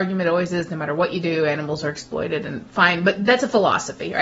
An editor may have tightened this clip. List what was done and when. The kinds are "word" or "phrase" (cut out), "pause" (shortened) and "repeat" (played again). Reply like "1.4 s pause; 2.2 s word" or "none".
none